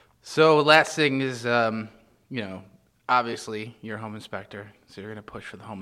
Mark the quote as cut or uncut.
uncut